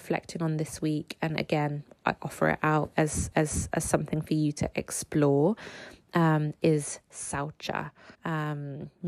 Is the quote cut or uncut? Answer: cut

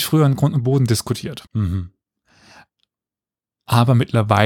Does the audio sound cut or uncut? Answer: cut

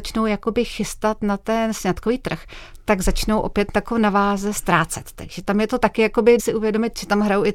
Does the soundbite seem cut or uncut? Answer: cut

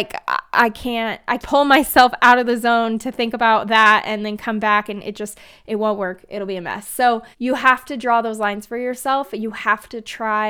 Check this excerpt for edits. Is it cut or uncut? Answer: cut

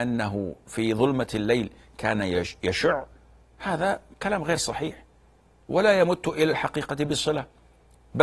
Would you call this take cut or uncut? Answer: uncut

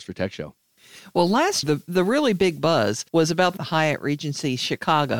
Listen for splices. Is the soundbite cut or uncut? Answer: cut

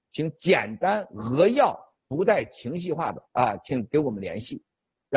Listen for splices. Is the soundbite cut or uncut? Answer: cut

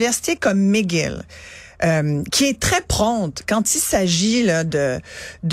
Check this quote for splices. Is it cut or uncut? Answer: uncut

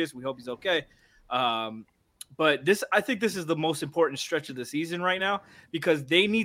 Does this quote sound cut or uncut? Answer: uncut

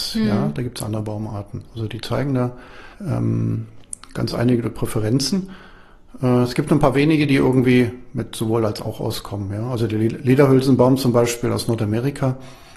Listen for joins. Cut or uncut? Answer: cut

